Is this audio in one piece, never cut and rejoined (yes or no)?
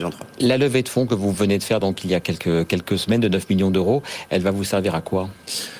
yes